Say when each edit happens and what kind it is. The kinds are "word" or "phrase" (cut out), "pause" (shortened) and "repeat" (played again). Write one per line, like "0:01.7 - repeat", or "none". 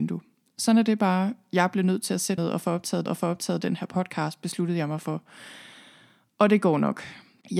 0:02.4 - word
0:03.1 - repeat